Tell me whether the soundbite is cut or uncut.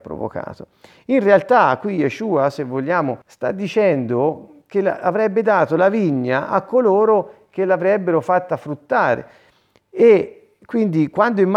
cut